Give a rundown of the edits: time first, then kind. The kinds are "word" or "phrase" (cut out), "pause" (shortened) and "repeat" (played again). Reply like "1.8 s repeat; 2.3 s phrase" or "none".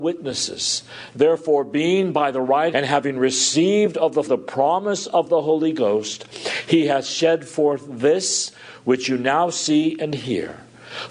2.7 s phrase; 4.2 s word

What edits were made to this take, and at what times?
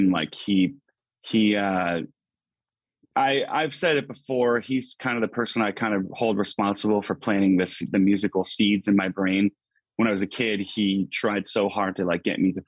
none

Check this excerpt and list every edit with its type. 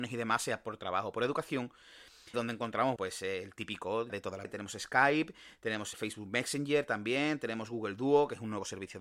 2.3 s word; 3.0 s word; 4.1 s word; 4.4 s word; 5.9 s word

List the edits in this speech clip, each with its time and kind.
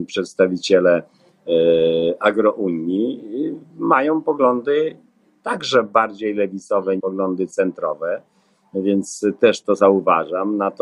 7.0 s word

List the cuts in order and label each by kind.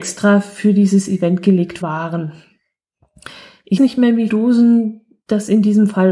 1.8 s word; 3.8 s word; 4.3 s word

